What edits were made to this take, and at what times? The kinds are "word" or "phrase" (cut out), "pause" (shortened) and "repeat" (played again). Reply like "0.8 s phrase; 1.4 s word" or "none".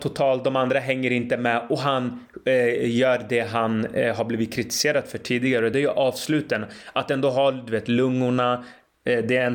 none